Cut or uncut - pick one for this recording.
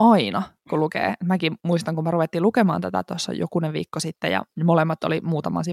uncut